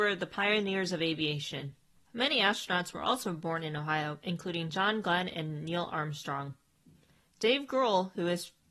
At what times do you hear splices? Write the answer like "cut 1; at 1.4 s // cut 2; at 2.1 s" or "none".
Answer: cut 1; at 2.0 s